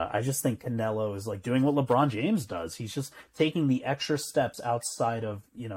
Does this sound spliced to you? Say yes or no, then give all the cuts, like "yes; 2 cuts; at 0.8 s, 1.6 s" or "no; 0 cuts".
no; 0 cuts